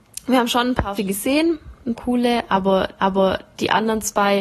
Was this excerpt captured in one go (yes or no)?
no